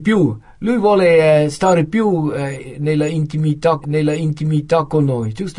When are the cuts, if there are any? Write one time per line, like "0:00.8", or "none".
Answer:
0:03.8